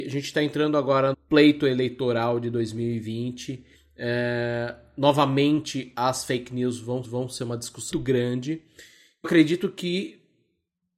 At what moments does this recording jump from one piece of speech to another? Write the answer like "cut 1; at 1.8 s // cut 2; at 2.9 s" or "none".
cut 1; at 1.1 s // cut 2; at 3.8 s // cut 3; at 7.0 s // cut 4; at 7.9 s // cut 5; at 9.2 s